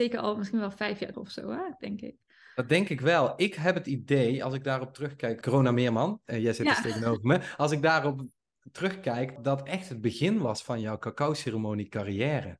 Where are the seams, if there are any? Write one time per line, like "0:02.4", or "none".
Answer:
0:01.1
0:05.4
0:09.4